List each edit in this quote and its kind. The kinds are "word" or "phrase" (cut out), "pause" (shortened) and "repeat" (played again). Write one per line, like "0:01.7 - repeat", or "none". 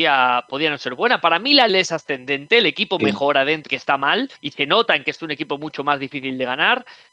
0:01.7 - phrase
0:03.7 - word
0:04.3 - pause